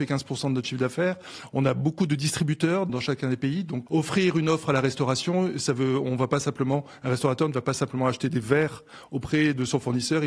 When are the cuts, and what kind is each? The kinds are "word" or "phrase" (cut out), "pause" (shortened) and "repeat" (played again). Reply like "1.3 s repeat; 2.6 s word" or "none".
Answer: 2.9 s word; 3.9 s phrase